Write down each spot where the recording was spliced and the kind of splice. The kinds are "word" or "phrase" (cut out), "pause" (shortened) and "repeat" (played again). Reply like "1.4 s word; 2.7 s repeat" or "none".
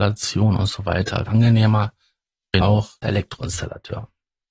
1.3 s word; 2.6 s word; 3.0 s word